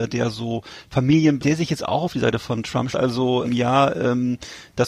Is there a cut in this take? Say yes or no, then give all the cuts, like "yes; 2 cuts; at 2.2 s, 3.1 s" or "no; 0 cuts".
yes; 3 cuts; at 1.4 s, 2.9 s, 3.4 s